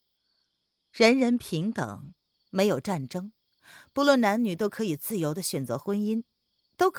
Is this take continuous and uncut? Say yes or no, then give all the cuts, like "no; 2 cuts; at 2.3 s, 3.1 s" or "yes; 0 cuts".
yes; 0 cuts